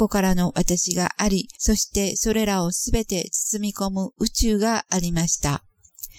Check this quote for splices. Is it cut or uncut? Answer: cut